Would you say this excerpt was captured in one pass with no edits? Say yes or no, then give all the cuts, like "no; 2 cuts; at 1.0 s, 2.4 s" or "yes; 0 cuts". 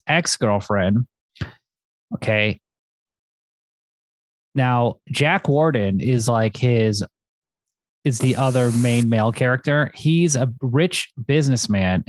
yes; 0 cuts